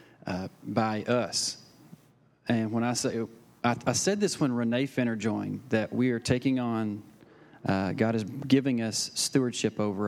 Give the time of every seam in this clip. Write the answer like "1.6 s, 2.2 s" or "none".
none